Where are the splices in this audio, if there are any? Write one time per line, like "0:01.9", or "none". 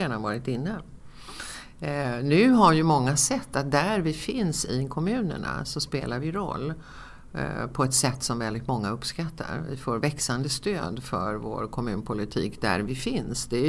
none